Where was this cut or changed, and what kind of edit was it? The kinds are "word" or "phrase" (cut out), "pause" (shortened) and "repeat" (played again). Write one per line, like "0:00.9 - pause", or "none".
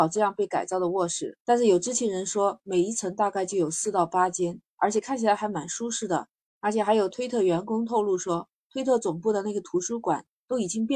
0:01.4 - pause
0:06.5 - pause

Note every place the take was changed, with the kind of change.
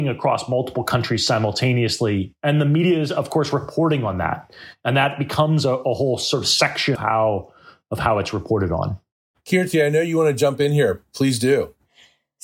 0:06.9 - word

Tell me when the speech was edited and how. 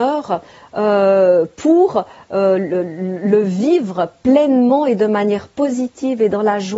none

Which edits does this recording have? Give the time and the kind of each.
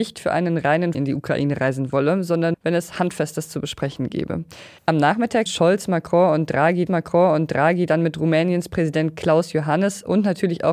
0:00.9 - word
0:02.5 - word
0:04.8 - pause
0:05.5 - word
0:06.9 - repeat

